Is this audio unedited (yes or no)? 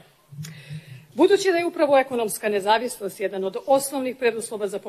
yes